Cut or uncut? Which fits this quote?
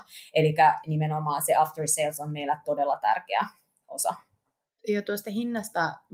uncut